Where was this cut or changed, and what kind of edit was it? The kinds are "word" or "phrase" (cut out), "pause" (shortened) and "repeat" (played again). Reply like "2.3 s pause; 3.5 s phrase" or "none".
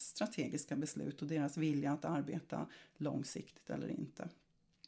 none

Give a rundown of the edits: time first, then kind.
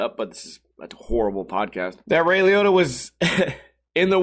2.0 s pause

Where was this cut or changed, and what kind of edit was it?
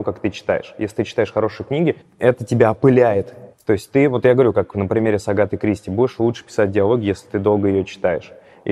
2.0 s pause; 3.5 s pause

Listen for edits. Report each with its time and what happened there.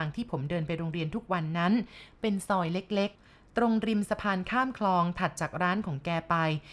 3.1 s pause

